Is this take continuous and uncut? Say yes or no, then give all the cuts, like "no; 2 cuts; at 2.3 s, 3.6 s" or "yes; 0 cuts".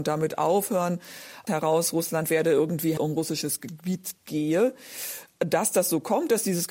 no; 2 cuts; at 1.5 s, 3.0 s